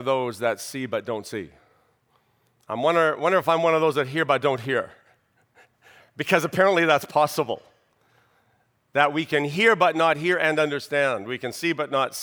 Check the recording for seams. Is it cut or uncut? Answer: uncut